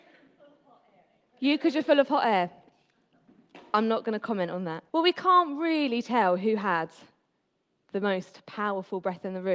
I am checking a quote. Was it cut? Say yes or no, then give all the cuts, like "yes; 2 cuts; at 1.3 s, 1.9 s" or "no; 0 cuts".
yes; 1 cut; at 4.9 s